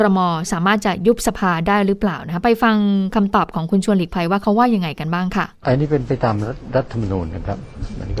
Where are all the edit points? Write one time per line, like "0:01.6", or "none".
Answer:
0:05.5